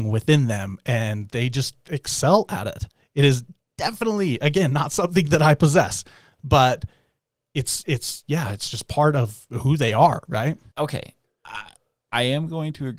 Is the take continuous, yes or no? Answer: no